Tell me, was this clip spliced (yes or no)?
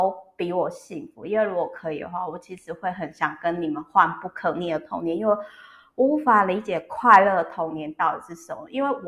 no